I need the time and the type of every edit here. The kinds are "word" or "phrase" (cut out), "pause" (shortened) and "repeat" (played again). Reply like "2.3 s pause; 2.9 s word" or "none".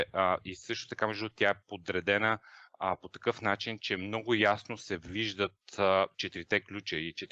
none

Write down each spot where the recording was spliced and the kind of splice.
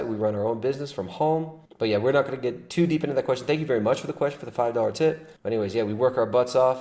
1.7 s pause; 5.4 s pause

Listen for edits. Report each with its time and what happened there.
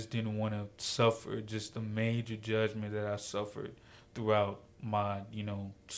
none

